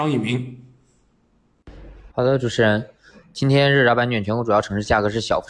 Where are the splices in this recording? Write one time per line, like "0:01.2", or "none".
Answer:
0:02.1